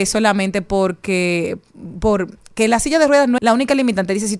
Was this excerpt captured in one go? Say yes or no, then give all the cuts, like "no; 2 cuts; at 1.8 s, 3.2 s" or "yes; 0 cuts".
no; 1 cut; at 3.4 s